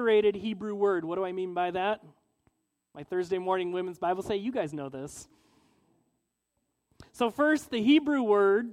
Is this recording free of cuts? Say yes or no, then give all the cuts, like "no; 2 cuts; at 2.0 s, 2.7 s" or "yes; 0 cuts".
yes; 0 cuts